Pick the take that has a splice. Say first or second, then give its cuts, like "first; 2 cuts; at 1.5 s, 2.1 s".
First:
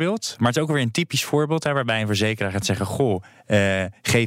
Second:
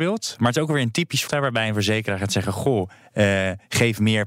second; 1 cut; at 1.3 s